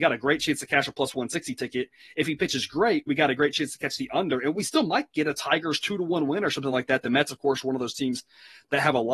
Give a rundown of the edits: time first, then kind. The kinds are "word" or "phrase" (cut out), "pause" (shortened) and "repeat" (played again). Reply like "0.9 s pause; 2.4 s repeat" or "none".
none